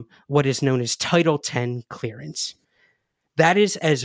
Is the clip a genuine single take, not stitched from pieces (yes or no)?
yes